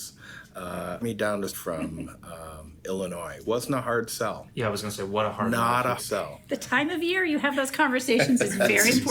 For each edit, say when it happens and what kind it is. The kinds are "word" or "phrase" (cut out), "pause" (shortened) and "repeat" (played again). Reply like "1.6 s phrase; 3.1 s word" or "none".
1.0 s word; 1.5 s word; 3.4 s word; 6.0 s word